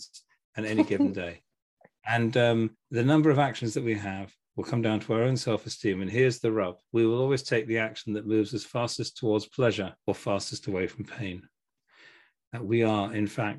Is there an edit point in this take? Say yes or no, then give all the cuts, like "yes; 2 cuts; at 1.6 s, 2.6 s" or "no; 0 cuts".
yes; 3 cuts; at 2.7 s, 6.8 s, 10.0 s